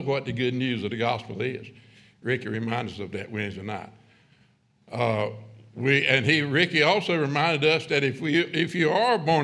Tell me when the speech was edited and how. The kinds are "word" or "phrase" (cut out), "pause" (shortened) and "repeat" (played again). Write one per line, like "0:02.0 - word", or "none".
none